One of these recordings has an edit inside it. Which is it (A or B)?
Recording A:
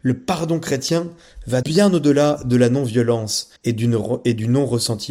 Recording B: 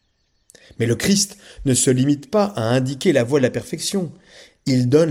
A